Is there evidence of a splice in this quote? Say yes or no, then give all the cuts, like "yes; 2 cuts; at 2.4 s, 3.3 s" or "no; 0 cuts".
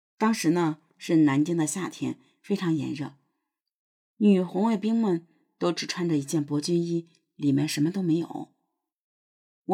no; 0 cuts